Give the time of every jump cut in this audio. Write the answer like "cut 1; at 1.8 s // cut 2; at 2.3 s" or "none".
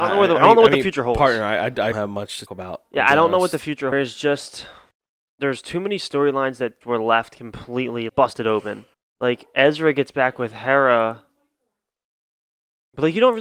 cut 1; at 1.9 s // cut 2; at 2.5 s // cut 3; at 3.9 s // cut 4; at 4.9 s // cut 5; at 6.8 s // cut 6; at 8.1 s // cut 7; at 8.9 s